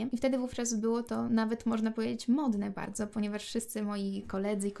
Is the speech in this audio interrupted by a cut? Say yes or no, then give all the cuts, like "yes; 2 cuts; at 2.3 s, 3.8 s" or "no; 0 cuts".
no; 0 cuts